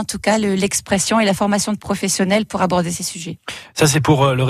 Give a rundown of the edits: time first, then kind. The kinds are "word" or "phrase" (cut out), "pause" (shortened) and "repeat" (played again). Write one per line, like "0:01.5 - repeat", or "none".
none